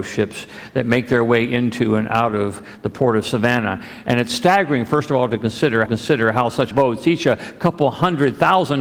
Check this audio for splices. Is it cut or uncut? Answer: cut